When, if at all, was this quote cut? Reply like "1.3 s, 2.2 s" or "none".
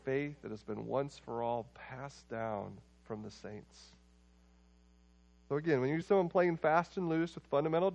6.0 s